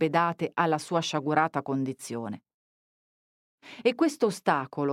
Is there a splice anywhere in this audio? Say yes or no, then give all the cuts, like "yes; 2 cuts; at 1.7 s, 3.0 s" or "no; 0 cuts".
no; 0 cuts